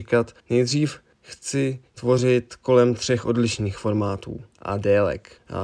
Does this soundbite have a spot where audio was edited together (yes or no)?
no